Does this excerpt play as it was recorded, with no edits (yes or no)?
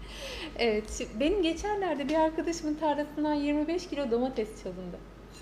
yes